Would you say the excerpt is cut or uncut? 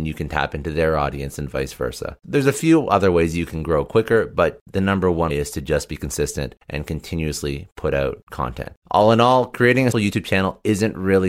cut